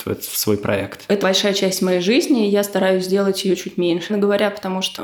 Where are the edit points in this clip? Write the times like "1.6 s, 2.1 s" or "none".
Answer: 1.2 s, 4.1 s